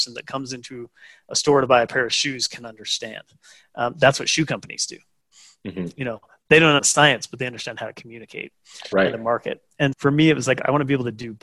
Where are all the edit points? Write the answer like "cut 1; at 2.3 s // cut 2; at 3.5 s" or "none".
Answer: cut 1; at 6.8 s // cut 2; at 8.9 s // cut 3; at 9.9 s